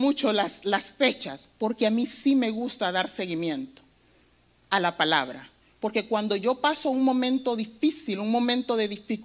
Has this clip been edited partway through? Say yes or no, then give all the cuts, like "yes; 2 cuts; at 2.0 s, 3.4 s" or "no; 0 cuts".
no; 0 cuts